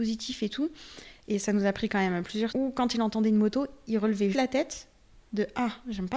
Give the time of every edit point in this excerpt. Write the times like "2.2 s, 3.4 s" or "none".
2.5 s, 4.3 s